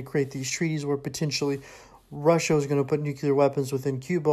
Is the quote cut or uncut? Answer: uncut